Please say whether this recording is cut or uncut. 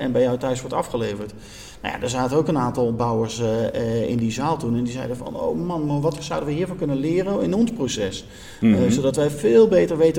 uncut